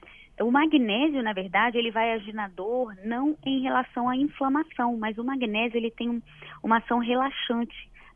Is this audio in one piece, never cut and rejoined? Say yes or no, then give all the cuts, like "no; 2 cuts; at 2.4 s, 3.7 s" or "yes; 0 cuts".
yes; 0 cuts